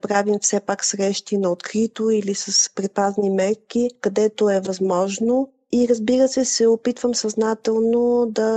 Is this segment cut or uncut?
uncut